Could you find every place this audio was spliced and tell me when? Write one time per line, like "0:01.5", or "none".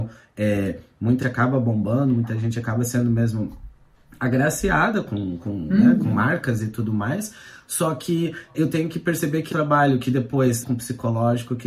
0:01.2
0:08.5
0:09.5
0:10.6